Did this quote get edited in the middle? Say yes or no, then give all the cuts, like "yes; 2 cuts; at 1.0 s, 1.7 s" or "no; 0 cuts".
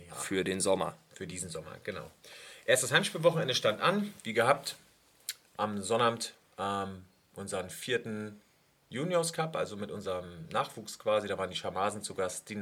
no; 0 cuts